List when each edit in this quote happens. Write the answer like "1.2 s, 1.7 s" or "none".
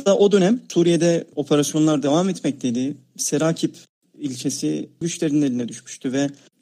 5.0 s